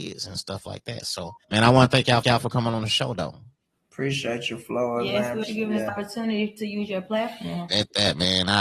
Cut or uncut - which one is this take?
cut